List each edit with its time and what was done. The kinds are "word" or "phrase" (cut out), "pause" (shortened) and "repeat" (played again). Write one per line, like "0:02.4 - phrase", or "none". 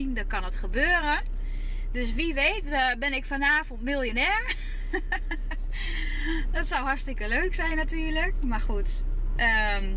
none

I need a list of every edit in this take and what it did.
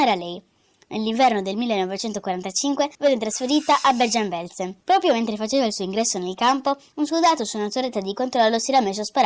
0:02.9 - pause
0:04.8 - pause

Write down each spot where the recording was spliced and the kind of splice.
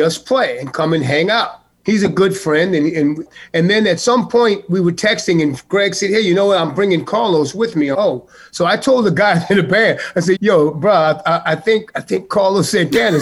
0:07.9 - word
0:10.3 - word

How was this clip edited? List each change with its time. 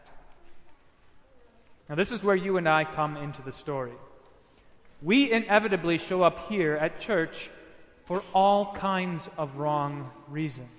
0:01.8 - pause

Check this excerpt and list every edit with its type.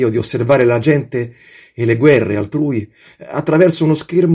none

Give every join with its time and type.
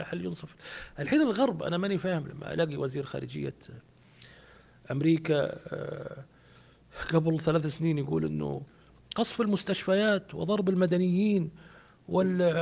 none

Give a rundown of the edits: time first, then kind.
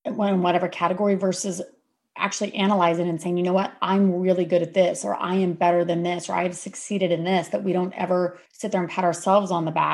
0:08.5 - pause

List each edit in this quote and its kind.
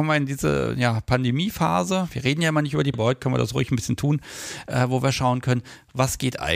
0:02.9 - word

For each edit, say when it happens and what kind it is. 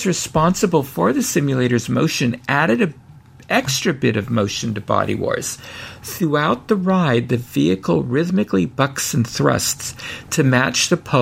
none

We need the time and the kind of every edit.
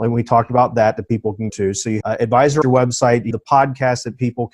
0:01.5 - word
0:02.0 - word
0:02.6 - word
0:03.3 - word

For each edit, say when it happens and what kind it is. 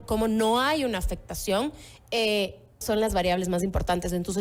0:02.8 - word

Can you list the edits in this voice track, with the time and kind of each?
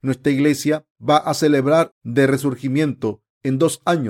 0:01.0 - pause
0:01.9 - phrase

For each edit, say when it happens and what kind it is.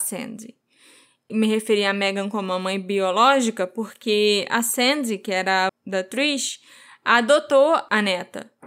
0:05.7 - word

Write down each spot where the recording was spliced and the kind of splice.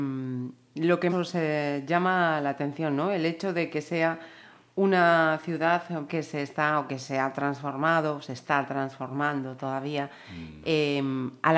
0:01.1 - word
0:06.1 - word

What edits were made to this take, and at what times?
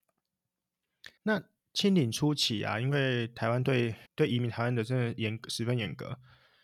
0:01.2 - pause
0:04.0 - pause

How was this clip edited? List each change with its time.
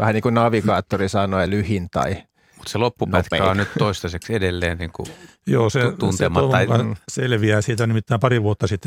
0:01.5 - word

